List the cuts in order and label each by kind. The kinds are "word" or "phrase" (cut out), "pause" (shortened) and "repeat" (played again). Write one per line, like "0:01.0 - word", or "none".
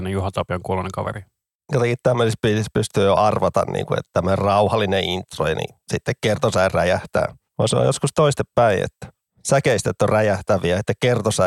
none